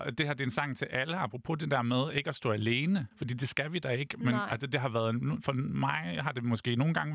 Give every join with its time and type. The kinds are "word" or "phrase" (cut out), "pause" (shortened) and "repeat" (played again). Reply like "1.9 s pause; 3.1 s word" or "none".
3.1 s pause